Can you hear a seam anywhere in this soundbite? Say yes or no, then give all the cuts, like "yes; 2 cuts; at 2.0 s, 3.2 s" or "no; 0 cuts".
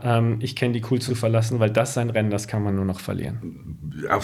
yes; 1 cut; at 1.1 s